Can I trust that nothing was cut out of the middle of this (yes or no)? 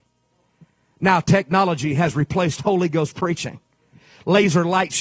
yes